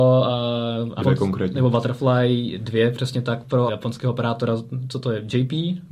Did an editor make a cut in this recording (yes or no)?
yes